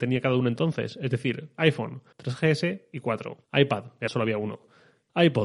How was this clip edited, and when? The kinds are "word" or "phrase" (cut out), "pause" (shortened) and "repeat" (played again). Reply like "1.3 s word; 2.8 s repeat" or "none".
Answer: 2.1 s pause; 3.4 s pause; 4.1 s word